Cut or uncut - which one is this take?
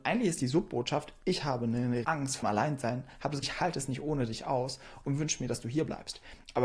cut